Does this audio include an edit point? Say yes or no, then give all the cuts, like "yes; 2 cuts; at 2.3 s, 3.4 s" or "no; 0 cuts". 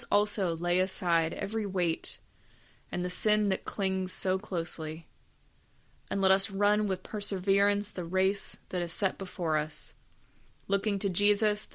no; 0 cuts